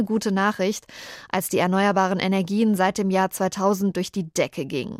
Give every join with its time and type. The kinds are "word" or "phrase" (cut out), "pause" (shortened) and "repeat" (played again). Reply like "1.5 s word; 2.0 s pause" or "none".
none